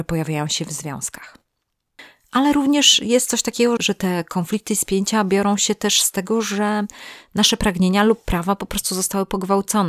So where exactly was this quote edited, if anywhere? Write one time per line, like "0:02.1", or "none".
0:03.8

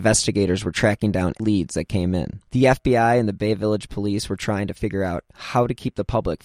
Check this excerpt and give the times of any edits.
0:01.4
0:02.5

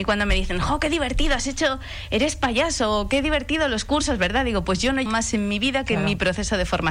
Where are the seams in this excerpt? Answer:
0:05.1

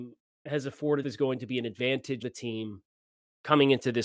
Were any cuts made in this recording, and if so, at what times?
0:01.0
0:02.2

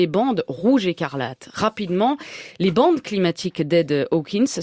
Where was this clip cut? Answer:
none

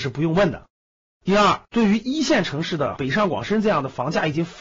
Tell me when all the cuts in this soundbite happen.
0:01.6

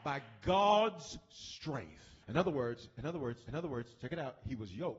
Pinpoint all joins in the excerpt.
0:02.2
0:03.5

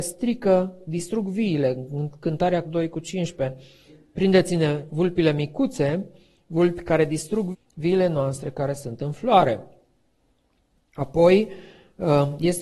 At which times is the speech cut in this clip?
0:02.6
0:07.5

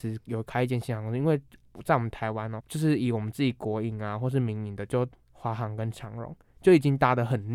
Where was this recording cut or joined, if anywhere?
0:02.6

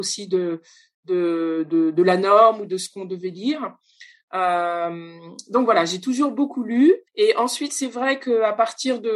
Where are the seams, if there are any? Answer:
0:07.1

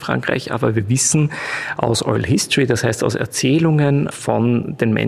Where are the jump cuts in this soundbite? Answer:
none

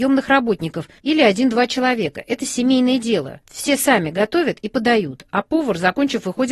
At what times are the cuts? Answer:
0:01.0
0:03.4

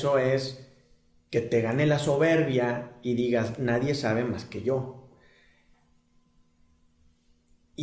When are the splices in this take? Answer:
none

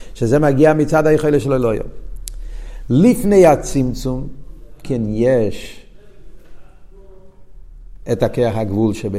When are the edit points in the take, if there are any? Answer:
0:04.8

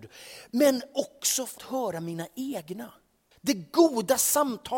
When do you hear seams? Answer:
0:01.6
0:03.3

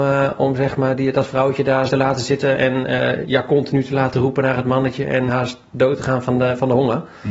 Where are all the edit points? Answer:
0:01.9
0:03.2
0:05.3

